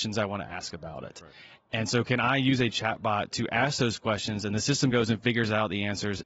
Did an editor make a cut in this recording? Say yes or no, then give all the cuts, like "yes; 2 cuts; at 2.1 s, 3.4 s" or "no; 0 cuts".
no; 0 cuts